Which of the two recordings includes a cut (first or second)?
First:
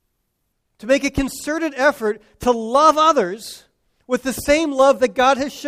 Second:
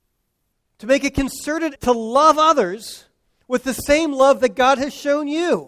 second